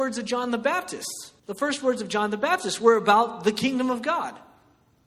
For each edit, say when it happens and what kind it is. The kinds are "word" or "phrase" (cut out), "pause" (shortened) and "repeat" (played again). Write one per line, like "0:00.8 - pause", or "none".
0:01.4 - pause